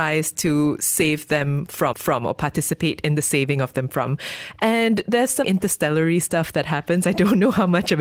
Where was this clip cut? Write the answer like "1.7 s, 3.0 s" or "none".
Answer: 1.9 s, 5.4 s

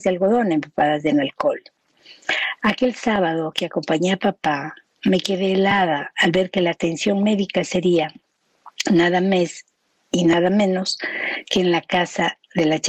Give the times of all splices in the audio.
none

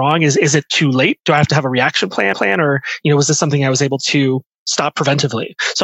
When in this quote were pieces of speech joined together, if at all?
2.3 s

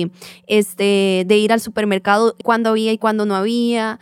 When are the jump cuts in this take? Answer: 2.4 s

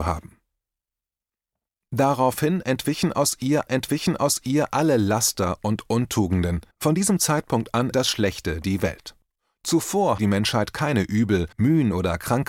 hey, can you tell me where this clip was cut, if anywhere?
3.7 s, 6.7 s, 7.9 s, 10.2 s, 11.5 s

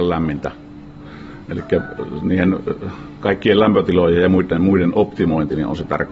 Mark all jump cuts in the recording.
none

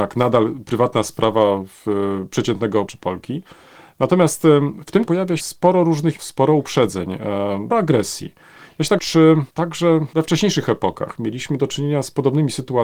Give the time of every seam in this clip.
2.9 s, 5.0 s, 5.4 s, 6.2 s, 7.7 s, 9.0 s

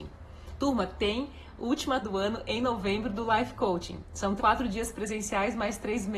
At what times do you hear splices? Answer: 2.0 s, 4.4 s

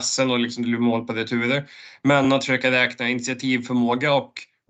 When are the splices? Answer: none

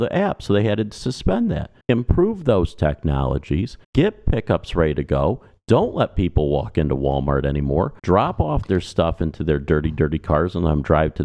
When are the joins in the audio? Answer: 1.8 s, 3.8 s, 8.0 s

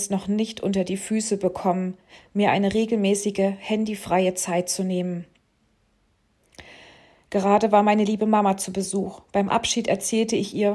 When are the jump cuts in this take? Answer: none

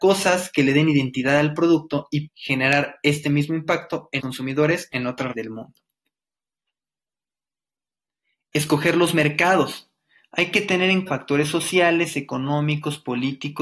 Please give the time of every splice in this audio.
2.3 s, 4.2 s, 5.3 s, 11.1 s

